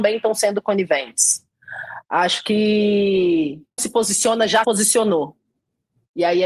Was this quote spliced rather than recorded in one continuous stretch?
yes; 2 cuts; at 3.8 s, 4.6 s

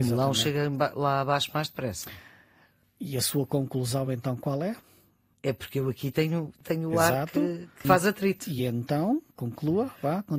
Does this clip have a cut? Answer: no; 0 cuts

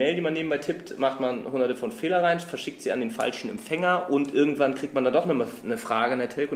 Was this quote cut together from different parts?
no; 0 cuts

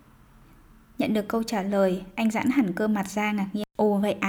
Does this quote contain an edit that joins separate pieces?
no; 0 cuts

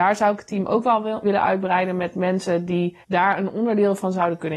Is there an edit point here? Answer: yes; 2 cuts; at 1.2 s, 3.0 s

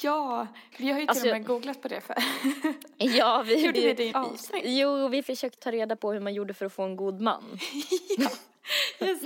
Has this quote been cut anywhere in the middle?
yes; 3 cuts; at 3.7 s, 4.1 s, 5.6 s

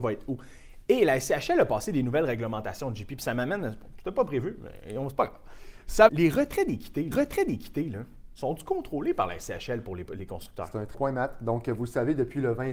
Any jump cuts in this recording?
yes; 3 cuts; at 6.1 s, 7.1 s, 10.9 s

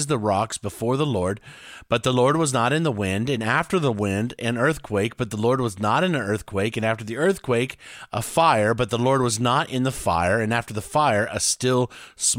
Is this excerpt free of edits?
yes; 0 cuts

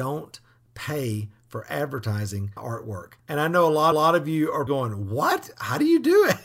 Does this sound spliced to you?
yes; 4 cuts; at 2.6 s, 3.2 s, 3.9 s, 4.7 s

